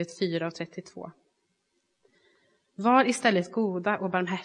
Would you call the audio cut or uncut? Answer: uncut